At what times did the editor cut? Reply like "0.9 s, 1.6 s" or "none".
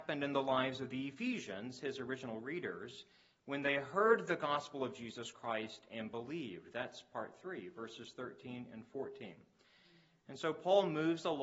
none